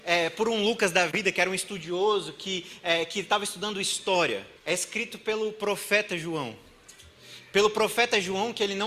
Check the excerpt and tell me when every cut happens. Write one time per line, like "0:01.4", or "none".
0:04.6